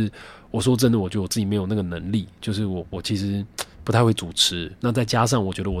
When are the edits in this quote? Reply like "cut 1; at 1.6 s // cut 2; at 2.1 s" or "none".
none